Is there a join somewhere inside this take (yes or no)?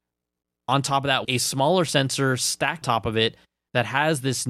yes